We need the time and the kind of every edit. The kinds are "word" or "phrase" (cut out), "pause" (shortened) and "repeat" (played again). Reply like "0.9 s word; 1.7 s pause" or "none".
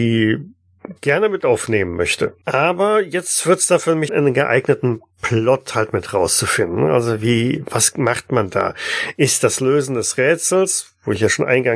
1.4 s phrase; 2.4 s pause; 4.1 s phrase